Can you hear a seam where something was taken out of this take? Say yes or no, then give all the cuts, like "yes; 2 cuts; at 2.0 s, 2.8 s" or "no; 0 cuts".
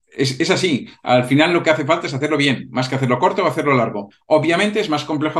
no; 0 cuts